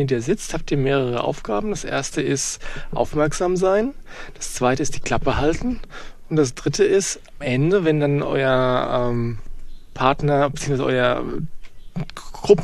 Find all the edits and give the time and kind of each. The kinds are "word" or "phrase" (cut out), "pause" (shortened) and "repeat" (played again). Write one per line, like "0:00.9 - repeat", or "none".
0:07.4 - word
0:08.2 - word